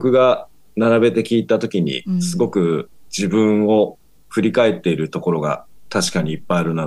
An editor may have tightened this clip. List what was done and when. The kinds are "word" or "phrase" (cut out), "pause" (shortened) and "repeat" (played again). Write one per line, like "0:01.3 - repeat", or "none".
none